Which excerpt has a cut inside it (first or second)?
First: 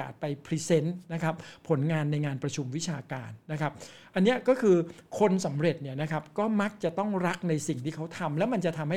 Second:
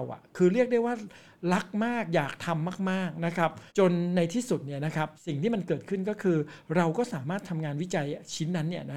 second